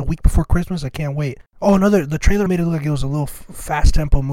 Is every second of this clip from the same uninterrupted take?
no; 1 cut; at 2.5 s

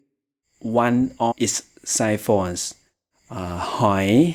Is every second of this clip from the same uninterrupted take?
no; 1 cut; at 1.3 s

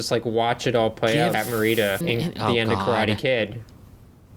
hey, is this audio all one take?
no; 2 cuts; at 1.3 s, 2.0 s

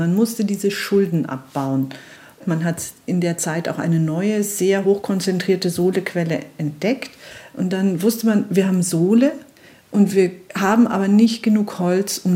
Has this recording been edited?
no; 0 cuts

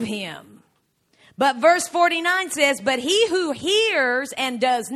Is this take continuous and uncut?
yes; 0 cuts

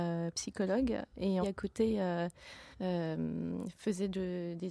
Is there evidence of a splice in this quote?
yes; 2 cuts; at 1.4 s, 2.7 s

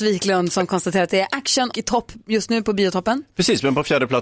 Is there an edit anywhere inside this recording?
yes; 1 cut; at 1.7 s

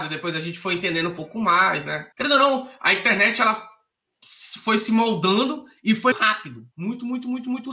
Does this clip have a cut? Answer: yes; 3 cuts; at 2.1 s, 6.1 s, 6.7 s

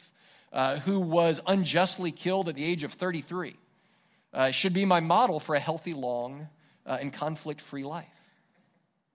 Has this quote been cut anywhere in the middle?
no; 0 cuts

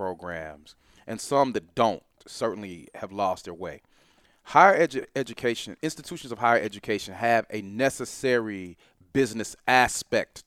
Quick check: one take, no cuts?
yes; 0 cuts

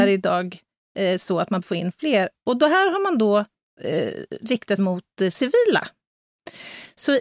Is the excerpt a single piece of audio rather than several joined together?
no; 3 cuts; at 1.6 s, 3.8 s, 4.8 s

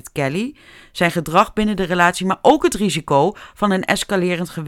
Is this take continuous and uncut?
yes; 0 cuts

